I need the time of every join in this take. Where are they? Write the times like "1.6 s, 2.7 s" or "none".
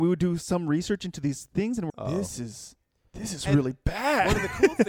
1.9 s